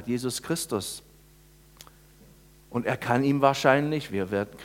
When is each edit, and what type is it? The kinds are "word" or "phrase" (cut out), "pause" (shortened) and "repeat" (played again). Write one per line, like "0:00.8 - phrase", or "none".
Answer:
none